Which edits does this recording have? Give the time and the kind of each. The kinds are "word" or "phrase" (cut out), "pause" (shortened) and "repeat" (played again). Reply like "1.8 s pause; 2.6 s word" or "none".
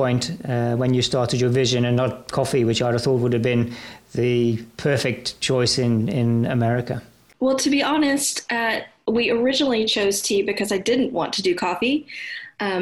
none